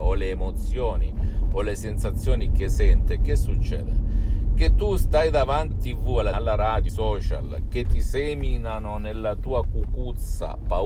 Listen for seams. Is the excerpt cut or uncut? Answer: cut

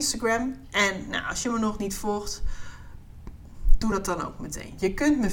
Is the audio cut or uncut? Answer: uncut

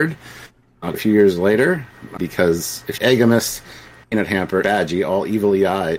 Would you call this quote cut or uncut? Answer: cut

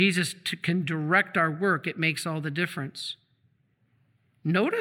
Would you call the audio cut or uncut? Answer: uncut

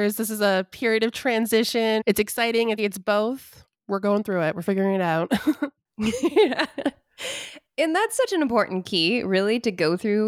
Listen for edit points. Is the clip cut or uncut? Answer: cut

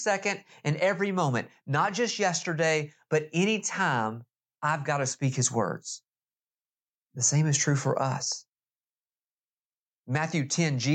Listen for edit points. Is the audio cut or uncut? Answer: uncut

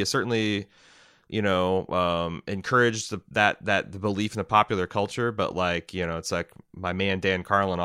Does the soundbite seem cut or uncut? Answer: uncut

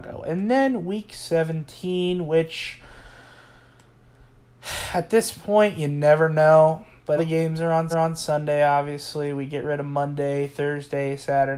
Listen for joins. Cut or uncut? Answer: cut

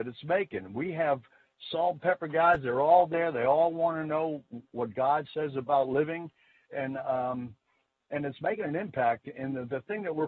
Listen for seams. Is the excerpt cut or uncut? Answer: uncut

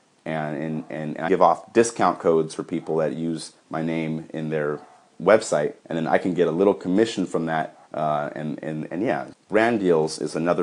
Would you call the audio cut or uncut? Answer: cut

